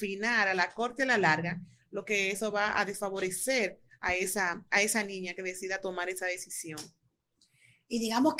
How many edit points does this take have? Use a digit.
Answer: 0